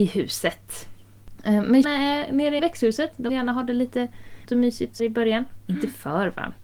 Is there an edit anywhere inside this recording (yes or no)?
yes